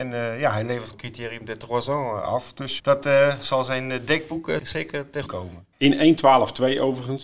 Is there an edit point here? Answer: yes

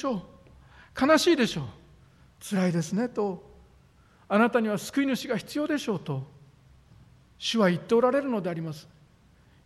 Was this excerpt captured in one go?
yes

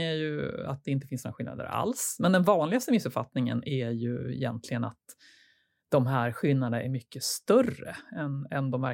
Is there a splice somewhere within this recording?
no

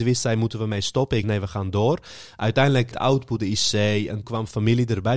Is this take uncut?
no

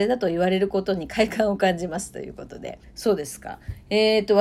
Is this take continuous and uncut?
no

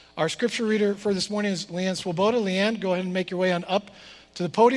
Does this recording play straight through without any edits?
yes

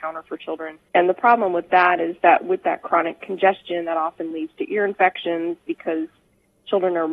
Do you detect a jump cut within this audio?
no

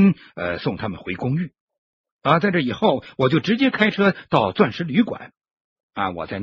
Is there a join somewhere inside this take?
no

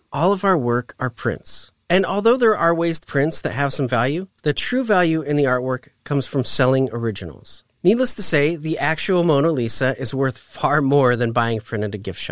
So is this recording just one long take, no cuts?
no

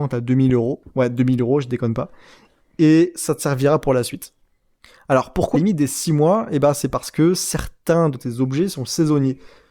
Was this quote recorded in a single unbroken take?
no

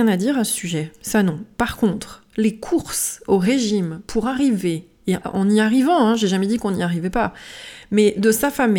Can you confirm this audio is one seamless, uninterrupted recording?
no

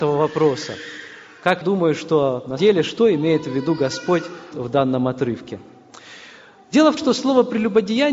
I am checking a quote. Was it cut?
yes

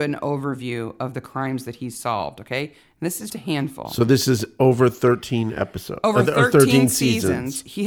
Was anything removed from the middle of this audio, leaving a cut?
yes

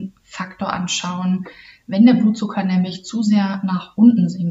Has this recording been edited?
no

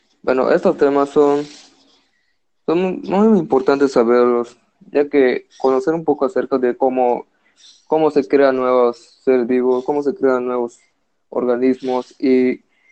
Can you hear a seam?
no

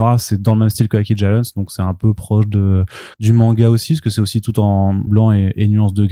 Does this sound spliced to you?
yes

